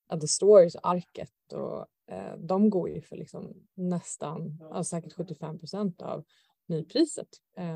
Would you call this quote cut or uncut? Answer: uncut